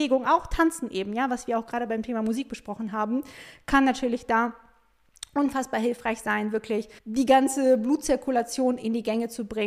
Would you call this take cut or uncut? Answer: cut